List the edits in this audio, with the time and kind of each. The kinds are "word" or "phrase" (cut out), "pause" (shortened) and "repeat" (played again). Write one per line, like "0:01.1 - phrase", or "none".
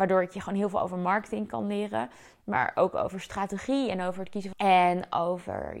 0:04.5 - phrase